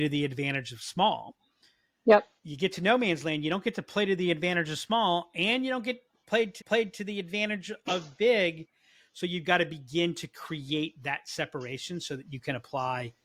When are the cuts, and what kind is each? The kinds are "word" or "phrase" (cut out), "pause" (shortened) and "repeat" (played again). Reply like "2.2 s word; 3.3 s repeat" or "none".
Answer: 2.4 s pause; 6.6 s repeat